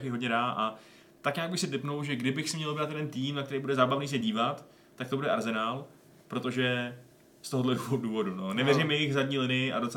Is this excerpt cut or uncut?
uncut